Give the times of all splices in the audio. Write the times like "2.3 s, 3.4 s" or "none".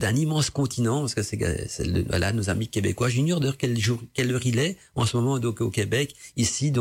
none